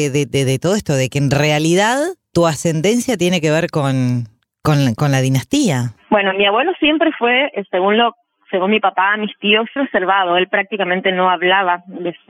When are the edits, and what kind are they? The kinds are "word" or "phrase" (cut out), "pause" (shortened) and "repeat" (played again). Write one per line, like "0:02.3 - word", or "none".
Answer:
0:09.8 - word